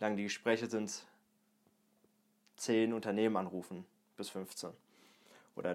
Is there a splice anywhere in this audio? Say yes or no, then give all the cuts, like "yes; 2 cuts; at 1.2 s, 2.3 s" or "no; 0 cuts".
no; 0 cuts